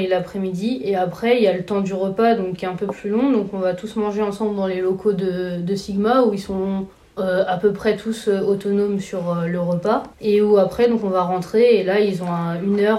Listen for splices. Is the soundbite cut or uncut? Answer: cut